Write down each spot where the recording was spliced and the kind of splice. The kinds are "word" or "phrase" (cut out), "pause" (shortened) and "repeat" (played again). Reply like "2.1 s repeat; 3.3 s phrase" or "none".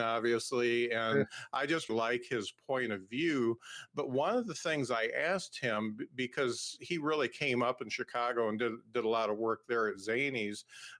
1.9 s word